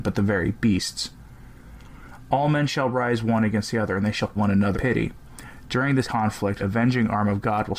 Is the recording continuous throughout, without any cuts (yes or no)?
no